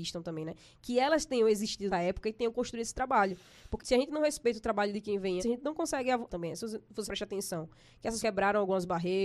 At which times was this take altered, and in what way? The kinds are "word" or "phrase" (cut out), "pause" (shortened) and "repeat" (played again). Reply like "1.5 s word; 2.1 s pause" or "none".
1.9 s word; 3.8 s word; 5.4 s word; 6.3 s word; 7.1 s word; 8.2 s word